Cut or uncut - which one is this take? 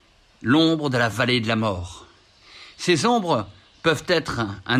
uncut